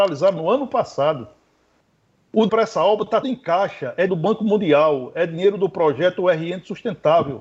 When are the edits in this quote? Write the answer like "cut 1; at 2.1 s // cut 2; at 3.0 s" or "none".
cut 1; at 2.5 s // cut 2; at 3.2 s // cut 3; at 4.1 s